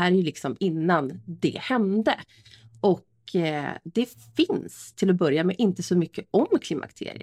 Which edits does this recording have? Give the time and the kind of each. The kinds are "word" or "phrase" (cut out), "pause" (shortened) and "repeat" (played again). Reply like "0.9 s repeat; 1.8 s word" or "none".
none